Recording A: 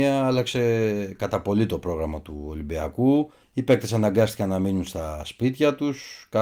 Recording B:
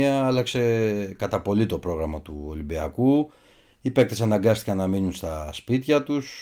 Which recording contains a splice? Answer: A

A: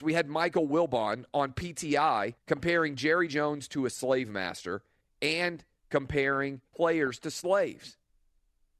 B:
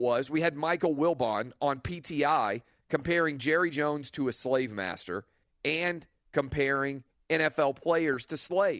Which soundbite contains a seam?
A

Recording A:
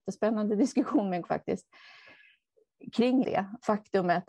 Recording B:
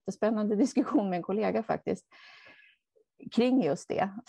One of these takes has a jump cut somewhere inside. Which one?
A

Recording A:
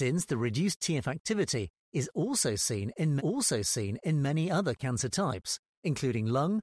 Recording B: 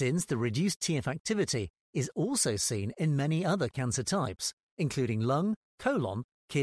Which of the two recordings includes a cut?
A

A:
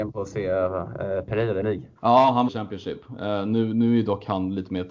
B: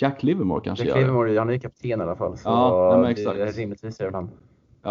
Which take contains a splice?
A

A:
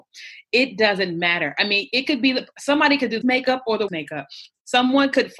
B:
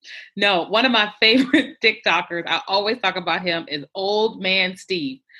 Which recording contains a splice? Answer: A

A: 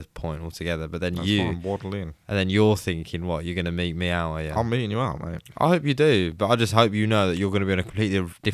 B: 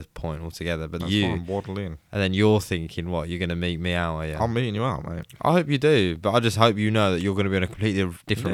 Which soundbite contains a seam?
B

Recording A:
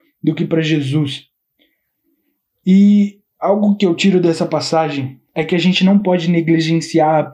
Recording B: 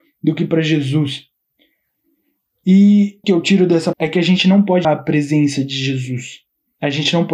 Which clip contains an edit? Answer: B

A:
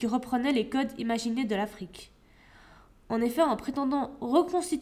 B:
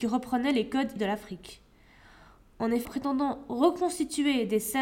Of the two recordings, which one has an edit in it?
B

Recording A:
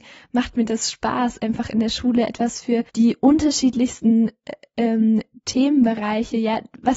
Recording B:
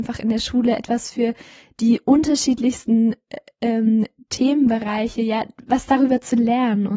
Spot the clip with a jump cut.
A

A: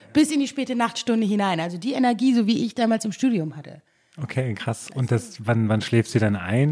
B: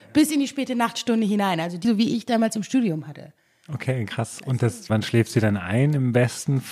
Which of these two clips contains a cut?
B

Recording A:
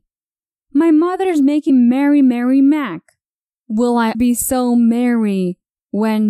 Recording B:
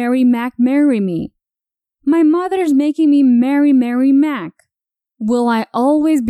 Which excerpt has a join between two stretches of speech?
A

